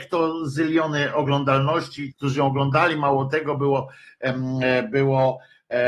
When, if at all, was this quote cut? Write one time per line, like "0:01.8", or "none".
0:02.1